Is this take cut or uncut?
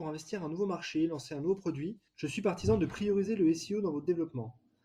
cut